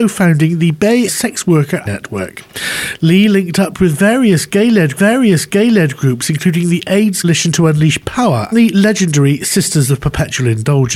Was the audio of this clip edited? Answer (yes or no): yes